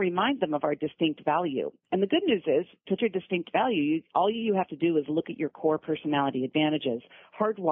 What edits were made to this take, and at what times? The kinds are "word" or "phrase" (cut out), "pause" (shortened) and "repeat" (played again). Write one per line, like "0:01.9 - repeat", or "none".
0:03.0 - word